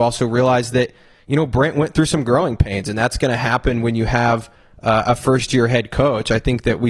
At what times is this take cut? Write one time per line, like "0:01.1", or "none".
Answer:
none

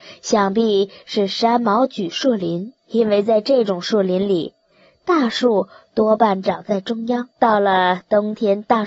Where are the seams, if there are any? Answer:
0:02.8
0:07.3

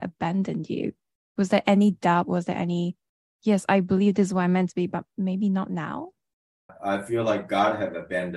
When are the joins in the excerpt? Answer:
none

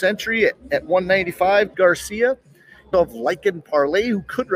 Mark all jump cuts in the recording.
0:01.7
0:02.9

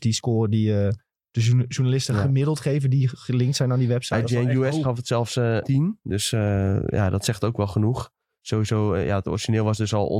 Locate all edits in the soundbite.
0:04.8
0:05.6

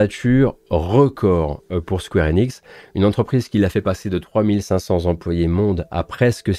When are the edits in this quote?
none

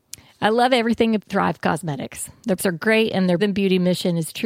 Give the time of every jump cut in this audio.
0:01.2
0:02.6
0:03.4

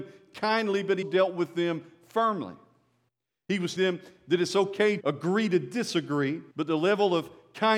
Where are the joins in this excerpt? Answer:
0:01.0
0:03.1
0:03.8
0:05.0
0:06.5

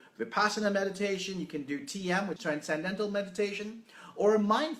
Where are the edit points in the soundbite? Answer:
0:02.4

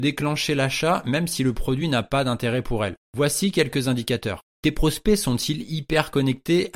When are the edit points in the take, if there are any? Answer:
none

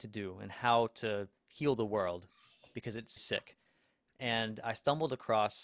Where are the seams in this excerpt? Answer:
0:03.2

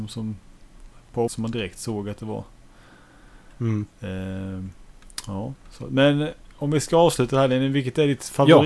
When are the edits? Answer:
0:01.3

